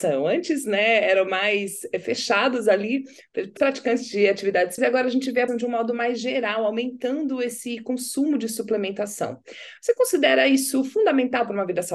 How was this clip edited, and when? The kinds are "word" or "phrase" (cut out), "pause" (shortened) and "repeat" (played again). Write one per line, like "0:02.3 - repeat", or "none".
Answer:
0:03.6 - word
0:04.8 - word
0:05.5 - word